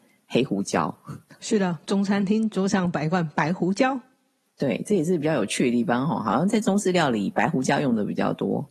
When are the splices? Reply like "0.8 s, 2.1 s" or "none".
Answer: none